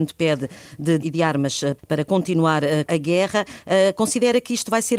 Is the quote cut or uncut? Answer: cut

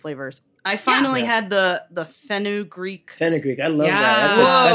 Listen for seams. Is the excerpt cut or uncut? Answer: uncut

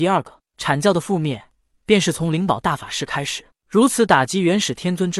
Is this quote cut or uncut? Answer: uncut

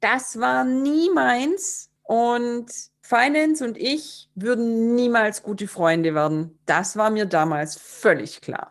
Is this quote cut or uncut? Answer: uncut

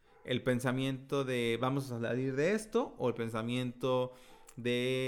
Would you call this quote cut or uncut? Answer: uncut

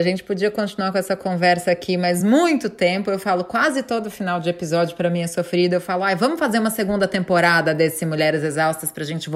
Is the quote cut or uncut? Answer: uncut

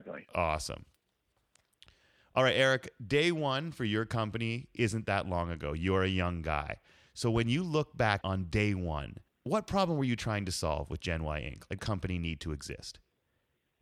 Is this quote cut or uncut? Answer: cut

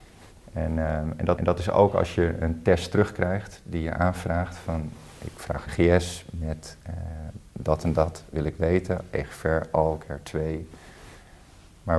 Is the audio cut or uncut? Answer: cut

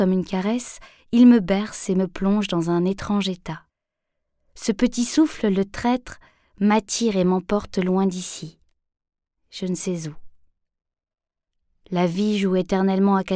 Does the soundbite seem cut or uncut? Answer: uncut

